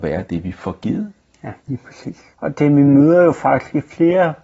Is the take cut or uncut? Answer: cut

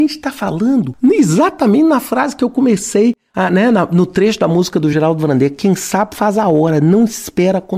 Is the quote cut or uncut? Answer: uncut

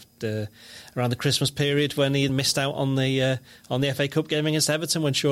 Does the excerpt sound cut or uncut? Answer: cut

